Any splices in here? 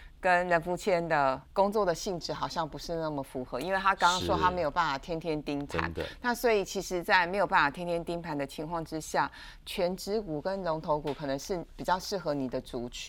yes; 1 cut; at 1.4 s

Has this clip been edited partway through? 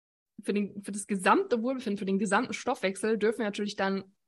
no; 0 cuts

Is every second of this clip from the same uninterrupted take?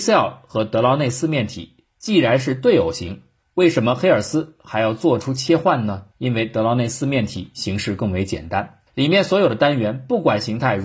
no; 3 cuts; at 3.4 s, 6.1 s, 8.9 s

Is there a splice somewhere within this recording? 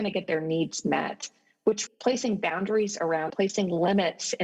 yes; 2 cuts; at 1.9 s, 3.3 s

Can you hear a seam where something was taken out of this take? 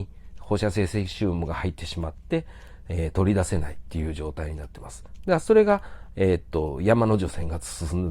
no; 0 cuts

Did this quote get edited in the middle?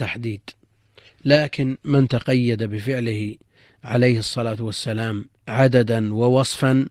yes; 1 cut; at 5.4 s

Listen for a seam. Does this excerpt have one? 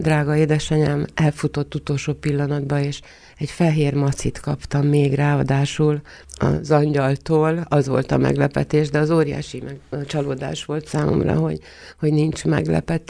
yes; 1 cut; at 6.2 s

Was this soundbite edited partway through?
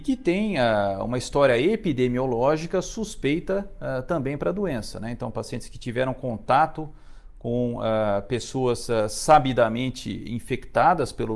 no; 0 cuts

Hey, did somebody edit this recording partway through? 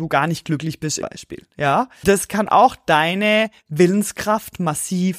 yes; 2 cuts; at 1.0 s, 2.0 s

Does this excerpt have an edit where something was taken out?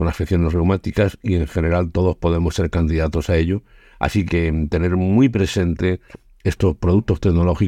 yes; 1 cut; at 4.3 s

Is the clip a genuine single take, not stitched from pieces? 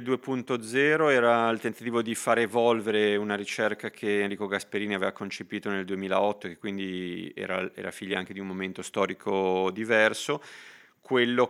yes; 0 cuts

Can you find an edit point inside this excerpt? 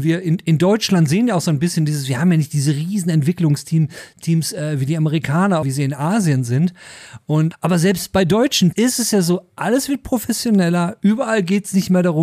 yes; 3 cuts; at 5.6 s, 7.5 s, 8.7 s

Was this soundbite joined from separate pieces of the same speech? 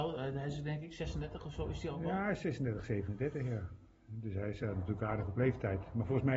no; 0 cuts

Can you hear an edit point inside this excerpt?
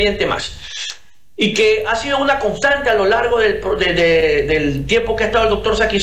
no; 0 cuts

